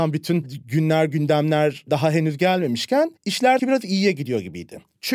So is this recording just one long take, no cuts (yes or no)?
no